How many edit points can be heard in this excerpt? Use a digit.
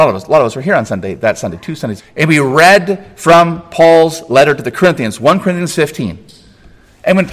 1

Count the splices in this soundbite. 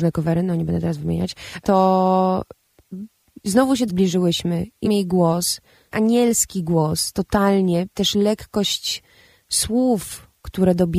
5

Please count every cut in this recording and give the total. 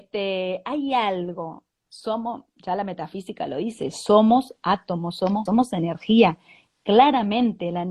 2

